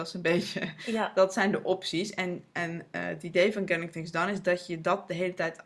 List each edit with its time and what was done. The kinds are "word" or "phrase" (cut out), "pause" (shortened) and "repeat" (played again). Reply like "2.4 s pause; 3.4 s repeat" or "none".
none